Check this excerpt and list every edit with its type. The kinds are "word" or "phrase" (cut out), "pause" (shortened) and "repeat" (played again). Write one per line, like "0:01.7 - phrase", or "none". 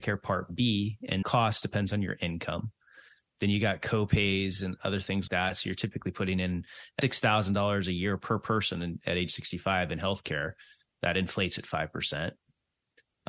0:01.2 - word
0:05.3 - word
0:07.0 - word